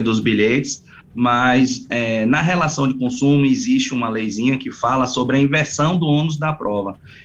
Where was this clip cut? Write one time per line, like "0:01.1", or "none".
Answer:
none